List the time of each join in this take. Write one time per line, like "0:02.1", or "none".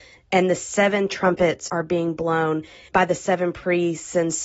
0:01.7
0:02.9